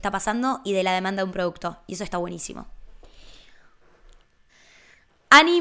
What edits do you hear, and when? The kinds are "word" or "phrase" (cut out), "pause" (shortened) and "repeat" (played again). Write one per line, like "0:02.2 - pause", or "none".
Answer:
none

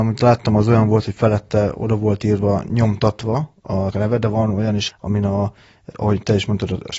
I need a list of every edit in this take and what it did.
0:03.9 - word
0:04.9 - word
0:05.9 - word

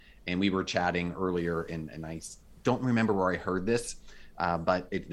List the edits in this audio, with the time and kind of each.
none

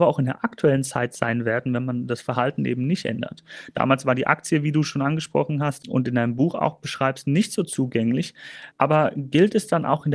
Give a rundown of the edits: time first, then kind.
0:08.7 - pause

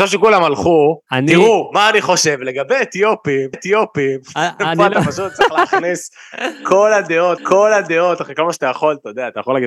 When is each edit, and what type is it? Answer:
0:01.1 - pause
0:03.5 - repeat
0:07.4 - repeat

